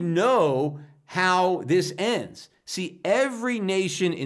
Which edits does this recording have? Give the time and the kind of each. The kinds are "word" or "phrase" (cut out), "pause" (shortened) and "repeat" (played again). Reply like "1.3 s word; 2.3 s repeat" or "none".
none